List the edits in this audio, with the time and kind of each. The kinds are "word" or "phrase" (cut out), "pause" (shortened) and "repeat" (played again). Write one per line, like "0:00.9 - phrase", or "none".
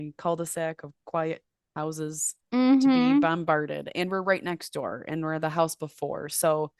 0:01.0 - pause
0:02.4 - pause